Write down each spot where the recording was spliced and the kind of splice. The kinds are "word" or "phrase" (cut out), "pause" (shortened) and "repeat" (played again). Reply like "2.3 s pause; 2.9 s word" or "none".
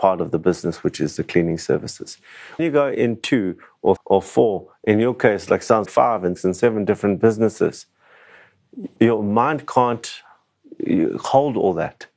2.6 s word; 4.0 s word; 5.9 s word; 6.4 s word; 9.0 s word